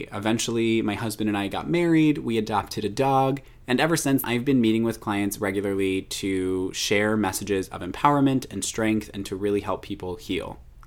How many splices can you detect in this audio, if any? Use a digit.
1